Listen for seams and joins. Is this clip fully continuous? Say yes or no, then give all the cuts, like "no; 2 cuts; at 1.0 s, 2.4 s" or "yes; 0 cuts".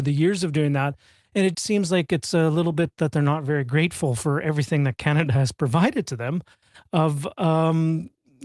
no; 1 cut; at 1.5 s